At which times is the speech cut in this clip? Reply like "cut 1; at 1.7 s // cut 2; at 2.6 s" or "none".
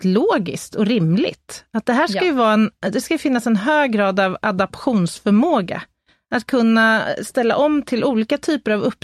none